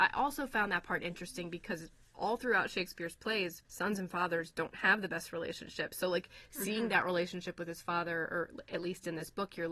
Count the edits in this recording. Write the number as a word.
one